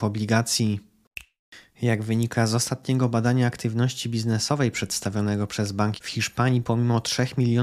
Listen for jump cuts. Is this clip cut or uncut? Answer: cut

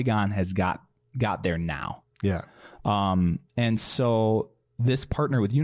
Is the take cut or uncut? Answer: cut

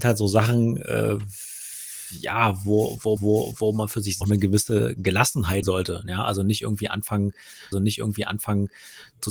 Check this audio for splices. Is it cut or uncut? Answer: cut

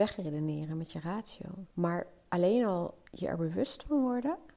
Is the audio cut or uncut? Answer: cut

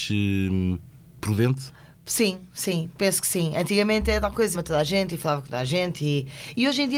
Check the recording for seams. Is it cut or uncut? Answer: cut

